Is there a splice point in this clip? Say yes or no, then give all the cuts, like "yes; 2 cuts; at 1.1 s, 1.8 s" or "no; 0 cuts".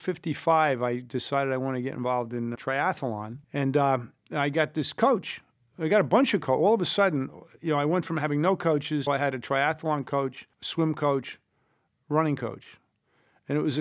yes; 4 cuts; at 2.6 s, 3.4 s, 9.1 s, 10.5 s